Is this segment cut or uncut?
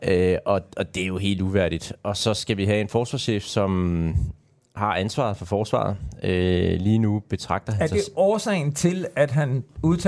uncut